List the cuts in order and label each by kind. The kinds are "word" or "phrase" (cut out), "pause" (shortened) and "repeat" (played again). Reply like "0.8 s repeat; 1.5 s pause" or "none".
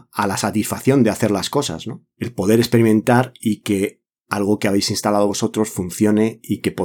none